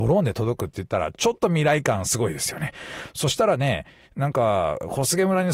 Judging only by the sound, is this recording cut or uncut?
uncut